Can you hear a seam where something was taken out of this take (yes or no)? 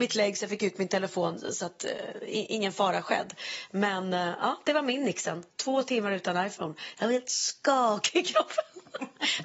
no